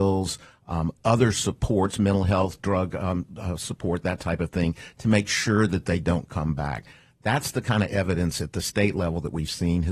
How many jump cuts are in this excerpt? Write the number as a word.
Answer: zero